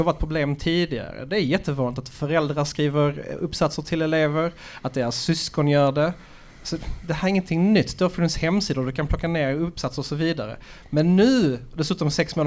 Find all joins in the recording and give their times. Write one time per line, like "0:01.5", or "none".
none